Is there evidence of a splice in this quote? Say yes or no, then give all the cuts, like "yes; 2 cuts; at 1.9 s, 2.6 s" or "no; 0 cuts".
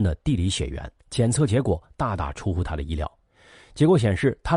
yes; 1 cut; at 1.0 s